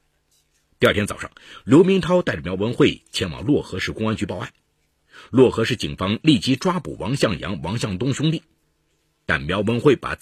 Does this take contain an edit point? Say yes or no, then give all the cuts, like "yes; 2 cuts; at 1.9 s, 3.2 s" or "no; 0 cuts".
no; 0 cuts